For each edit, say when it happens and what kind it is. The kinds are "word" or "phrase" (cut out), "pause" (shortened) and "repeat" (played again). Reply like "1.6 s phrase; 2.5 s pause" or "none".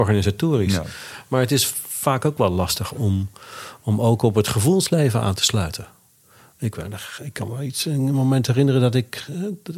none

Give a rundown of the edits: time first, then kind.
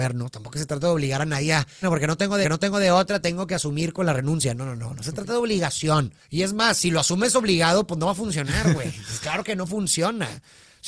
1.8 s word; 2.4 s repeat; 6.2 s pause

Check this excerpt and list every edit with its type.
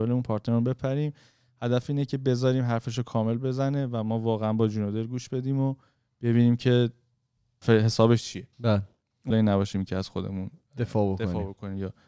7.6 s word; 8.5 s pause; 9.3 s phrase

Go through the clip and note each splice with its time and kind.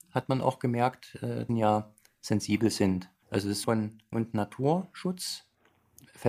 1.5 s phrase; 3.2 s pause; 3.6 s phrase; 4.1 s word

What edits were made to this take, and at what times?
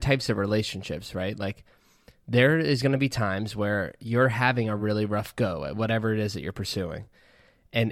none

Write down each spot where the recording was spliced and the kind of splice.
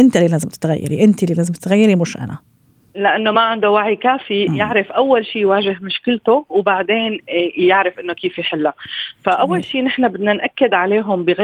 none

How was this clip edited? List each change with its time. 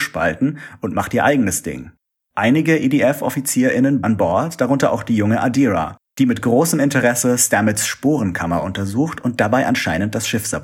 4.0 s word

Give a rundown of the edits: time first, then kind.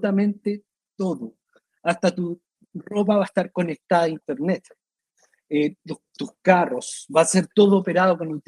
none

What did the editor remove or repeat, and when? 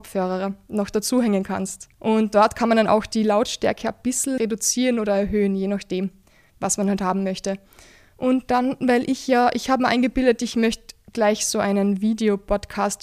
1.9 s pause; 4.4 s word

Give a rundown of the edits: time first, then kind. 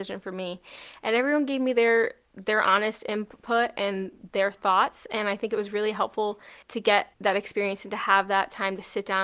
6.6 s pause; 7.1 s pause

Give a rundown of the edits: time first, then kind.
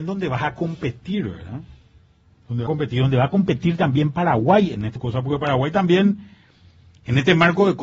2.7 s word; 5.0 s word

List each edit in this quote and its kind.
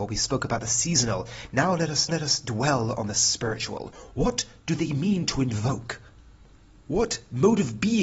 2.1 s repeat

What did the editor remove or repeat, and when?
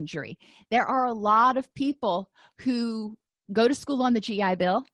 none

